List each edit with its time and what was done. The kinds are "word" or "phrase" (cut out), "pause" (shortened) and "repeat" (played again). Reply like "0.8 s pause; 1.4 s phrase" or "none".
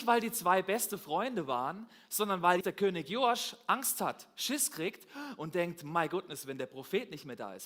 2.6 s word